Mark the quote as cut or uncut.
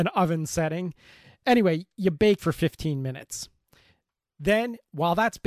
cut